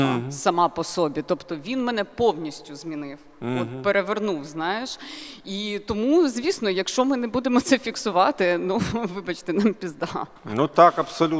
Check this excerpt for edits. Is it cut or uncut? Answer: uncut